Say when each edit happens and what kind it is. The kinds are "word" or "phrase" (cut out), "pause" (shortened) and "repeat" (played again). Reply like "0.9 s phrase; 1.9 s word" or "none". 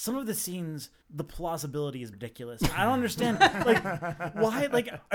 1.0 s pause; 2.1 s word